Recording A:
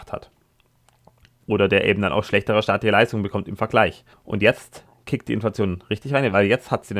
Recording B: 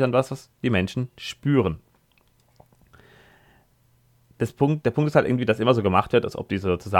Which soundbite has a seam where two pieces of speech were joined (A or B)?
A